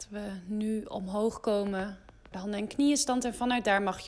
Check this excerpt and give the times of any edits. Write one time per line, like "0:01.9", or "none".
0:02.3